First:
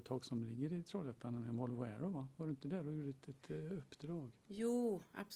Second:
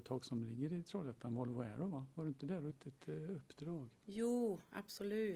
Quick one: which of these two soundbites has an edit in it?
second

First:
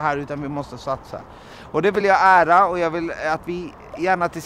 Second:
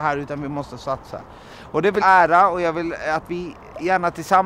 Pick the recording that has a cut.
second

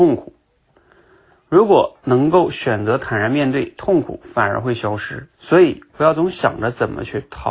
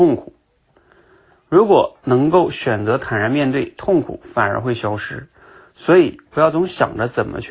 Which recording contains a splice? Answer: first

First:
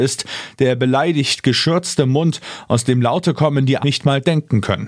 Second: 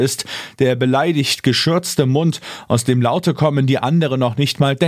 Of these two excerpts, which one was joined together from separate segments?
first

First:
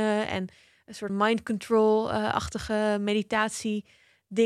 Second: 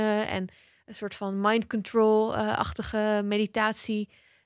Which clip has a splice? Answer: first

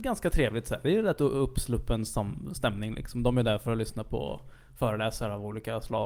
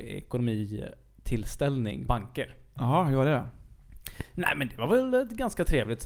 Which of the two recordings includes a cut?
second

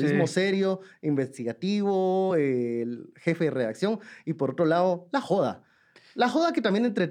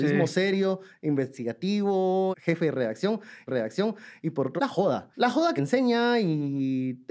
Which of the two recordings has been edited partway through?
second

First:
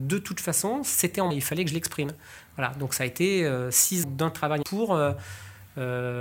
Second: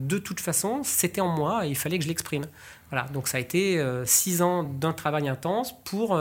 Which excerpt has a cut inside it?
first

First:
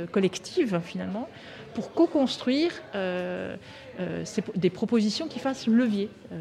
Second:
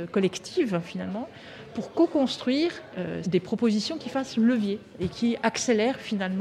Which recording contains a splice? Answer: second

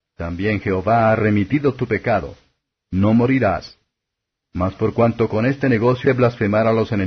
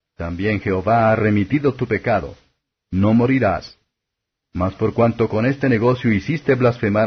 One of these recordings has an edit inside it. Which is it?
first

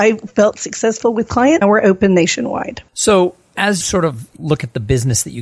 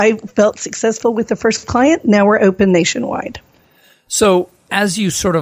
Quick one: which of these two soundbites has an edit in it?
first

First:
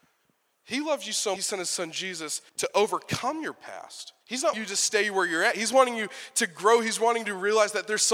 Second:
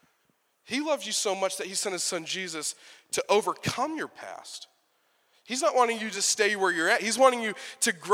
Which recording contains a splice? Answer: first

